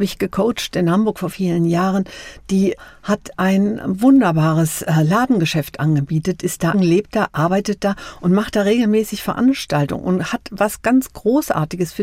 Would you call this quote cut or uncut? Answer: cut